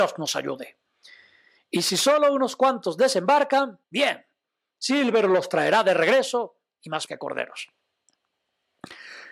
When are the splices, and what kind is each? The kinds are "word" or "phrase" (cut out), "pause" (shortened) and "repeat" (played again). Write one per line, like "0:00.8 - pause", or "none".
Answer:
0:03.8 - pause
0:07.1 - word